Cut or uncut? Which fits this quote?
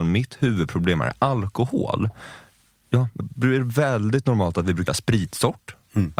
cut